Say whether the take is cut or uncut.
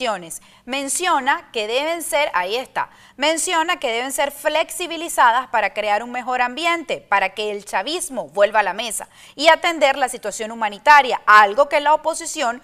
uncut